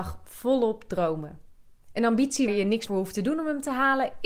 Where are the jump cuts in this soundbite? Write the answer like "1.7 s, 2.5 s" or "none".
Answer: 2.5 s, 2.9 s